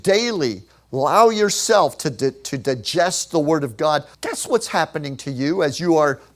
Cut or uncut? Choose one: cut